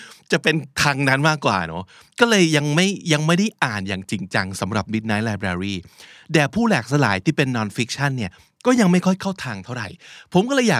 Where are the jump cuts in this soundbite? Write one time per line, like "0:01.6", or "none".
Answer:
none